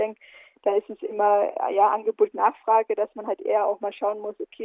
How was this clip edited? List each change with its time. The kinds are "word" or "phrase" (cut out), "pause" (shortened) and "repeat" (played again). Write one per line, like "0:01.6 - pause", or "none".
0:02.3 - word